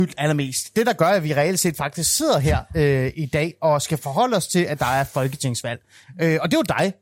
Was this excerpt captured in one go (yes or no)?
yes